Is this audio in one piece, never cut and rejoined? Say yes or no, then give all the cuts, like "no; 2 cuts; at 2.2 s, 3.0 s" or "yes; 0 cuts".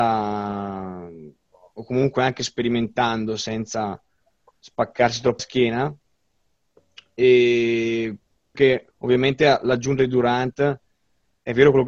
no; 3 cuts; at 5.4 s, 8.5 s, 8.9 s